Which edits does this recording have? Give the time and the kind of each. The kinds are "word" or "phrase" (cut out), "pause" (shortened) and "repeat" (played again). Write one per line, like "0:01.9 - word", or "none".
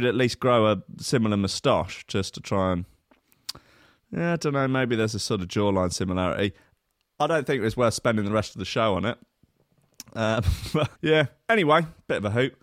0:10.9 - word